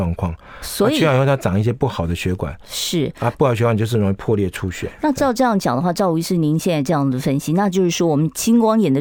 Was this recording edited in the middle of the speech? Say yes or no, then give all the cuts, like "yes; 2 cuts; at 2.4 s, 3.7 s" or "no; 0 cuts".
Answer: no; 0 cuts